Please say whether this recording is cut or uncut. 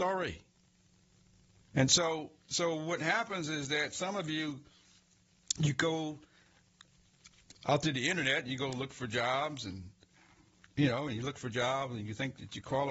uncut